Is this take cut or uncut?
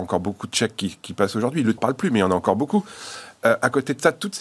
cut